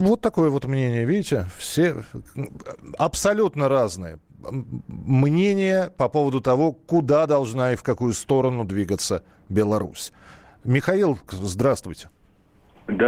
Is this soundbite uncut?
no; 1 cut; at 11.3 s

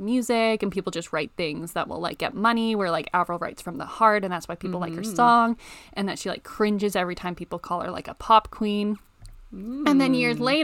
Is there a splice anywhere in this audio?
no; 0 cuts

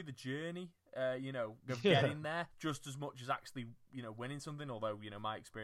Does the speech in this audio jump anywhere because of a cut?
yes; 1 cut; at 2.5 s

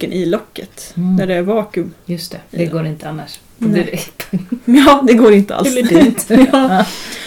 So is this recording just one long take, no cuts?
no; 1 cut; at 2.5 s

